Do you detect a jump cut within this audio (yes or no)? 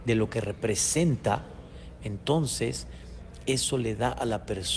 no